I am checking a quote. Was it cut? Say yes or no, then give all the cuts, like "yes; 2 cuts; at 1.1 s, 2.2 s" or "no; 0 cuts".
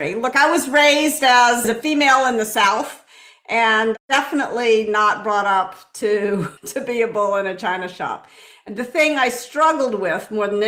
yes; 1 cut; at 6.6 s